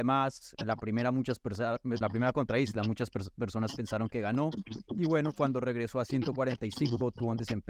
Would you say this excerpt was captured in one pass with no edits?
no; 1 cut; at 2.0 s

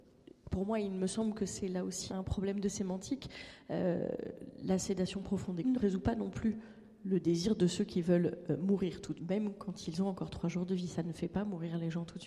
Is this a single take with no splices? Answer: no; 3 cuts; at 2.1 s, 5.6 s, 9.2 s

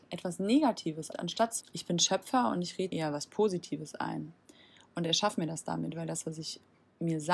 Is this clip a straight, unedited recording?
no; 3 cuts; at 1.1 s, 1.6 s, 2.9 s

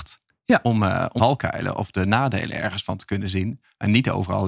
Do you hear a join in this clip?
yes; 1 cut; at 1.2 s

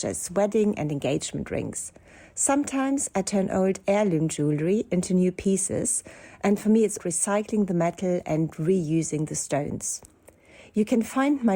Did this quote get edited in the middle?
yes; 1 cut; at 7.0 s

